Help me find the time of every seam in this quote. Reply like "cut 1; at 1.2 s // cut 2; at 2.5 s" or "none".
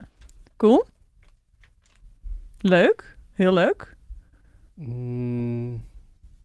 none